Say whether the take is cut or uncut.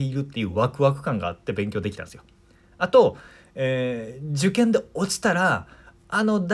uncut